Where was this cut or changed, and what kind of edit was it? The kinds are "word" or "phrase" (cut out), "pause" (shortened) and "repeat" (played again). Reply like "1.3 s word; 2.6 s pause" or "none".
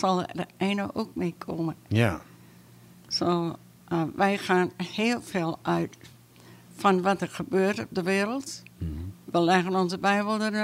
none